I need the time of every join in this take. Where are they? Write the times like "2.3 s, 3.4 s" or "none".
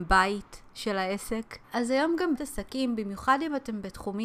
1.6 s, 2.4 s